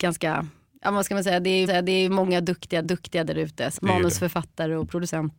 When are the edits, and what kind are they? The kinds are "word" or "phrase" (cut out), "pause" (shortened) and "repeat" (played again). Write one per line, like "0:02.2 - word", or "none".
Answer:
0:01.7 - repeat
0:02.8 - repeat
0:03.8 - word